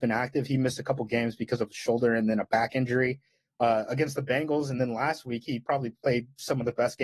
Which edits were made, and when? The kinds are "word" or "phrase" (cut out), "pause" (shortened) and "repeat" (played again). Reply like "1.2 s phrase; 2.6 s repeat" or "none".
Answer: none